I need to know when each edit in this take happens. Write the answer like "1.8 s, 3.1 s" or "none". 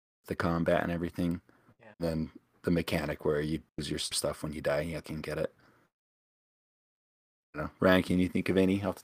1.9 s, 3.7 s, 4.1 s, 5.0 s